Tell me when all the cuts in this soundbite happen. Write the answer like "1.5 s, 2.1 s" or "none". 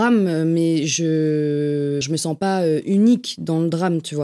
2.0 s